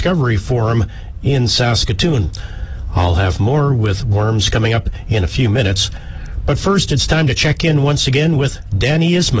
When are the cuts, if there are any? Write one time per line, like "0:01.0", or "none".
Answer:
none